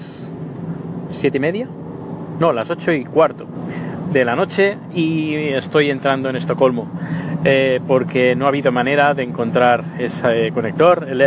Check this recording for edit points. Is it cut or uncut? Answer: uncut